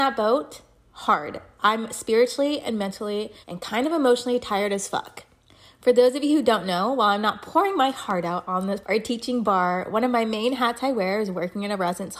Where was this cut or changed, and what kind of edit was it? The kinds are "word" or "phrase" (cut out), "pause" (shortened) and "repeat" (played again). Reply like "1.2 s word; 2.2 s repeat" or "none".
3.4 s pause; 5.5 s pause; 8.8 s word